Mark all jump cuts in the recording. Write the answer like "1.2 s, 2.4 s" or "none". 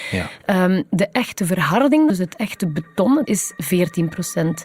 2.1 s